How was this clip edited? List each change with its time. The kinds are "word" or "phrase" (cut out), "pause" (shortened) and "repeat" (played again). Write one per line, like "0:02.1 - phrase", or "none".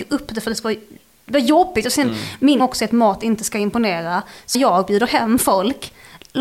0:02.6 - word
0:04.5 - word